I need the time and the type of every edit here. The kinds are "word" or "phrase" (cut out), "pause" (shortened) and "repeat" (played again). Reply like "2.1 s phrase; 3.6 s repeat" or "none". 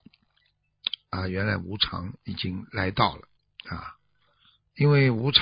3.4 s pause